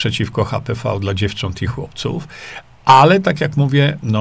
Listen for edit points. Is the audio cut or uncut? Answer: uncut